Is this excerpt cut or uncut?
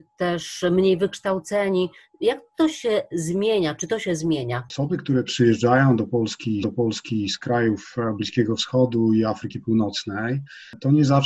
cut